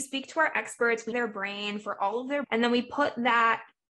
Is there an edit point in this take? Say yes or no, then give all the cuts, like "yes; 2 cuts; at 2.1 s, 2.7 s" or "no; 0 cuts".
yes; 2 cuts; at 1.1 s, 2.4 s